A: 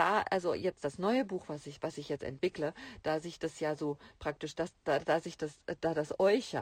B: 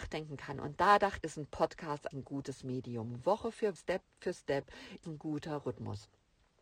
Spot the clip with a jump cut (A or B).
B